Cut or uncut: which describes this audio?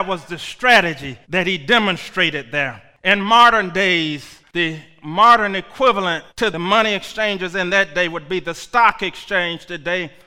cut